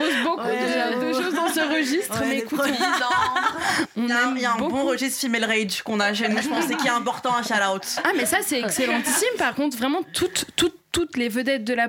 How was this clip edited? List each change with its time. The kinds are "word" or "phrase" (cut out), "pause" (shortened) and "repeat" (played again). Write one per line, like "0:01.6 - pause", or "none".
none